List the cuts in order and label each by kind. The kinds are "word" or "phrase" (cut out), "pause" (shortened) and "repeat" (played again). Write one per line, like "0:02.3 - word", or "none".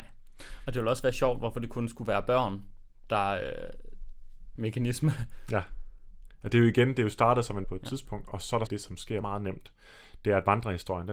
0:04.6 - phrase
0:07.6 - word
0:08.7 - phrase
0:09.2 - word